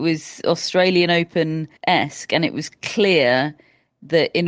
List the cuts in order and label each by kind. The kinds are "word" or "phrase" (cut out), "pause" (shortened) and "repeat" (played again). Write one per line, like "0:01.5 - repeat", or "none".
0:01.8 - pause